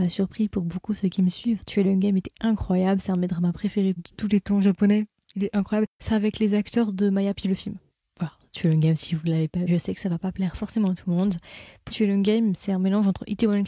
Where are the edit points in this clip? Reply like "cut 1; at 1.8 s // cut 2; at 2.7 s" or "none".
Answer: cut 1; at 4.0 s // cut 2; at 7.4 s // cut 3; at 9.7 s // cut 4; at 11.9 s